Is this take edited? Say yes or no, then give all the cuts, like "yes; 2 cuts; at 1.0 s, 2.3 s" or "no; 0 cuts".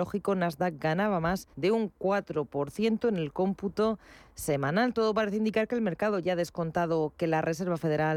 yes; 1 cut; at 1.5 s